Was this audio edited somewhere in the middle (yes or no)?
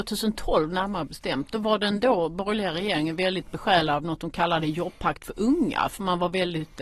no